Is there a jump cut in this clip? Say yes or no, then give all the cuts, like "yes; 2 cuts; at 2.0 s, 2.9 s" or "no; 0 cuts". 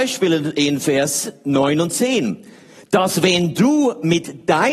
no; 0 cuts